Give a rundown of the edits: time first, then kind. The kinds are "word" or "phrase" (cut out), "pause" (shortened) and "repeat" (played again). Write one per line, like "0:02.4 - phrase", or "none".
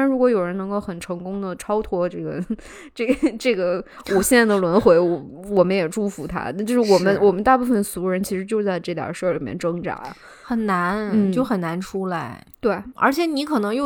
0:12.9 - word